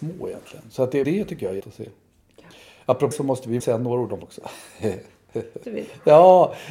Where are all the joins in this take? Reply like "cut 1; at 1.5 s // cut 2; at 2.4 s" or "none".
cut 1; at 1.0 s // cut 2; at 1.6 s // cut 3; at 3.1 s // cut 4; at 3.6 s // cut 5; at 4.2 s // cut 6; at 5.6 s